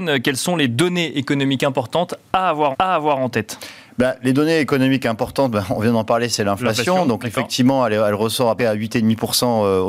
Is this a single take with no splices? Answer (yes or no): no